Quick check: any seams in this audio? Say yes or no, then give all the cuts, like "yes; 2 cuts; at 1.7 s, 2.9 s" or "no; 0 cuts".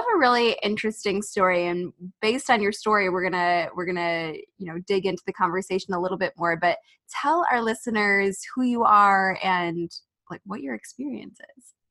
no; 0 cuts